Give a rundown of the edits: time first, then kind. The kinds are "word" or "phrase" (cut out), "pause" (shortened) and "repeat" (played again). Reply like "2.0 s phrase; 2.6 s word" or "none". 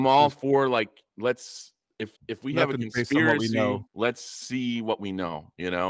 2.2 s pause; 3.9 s pause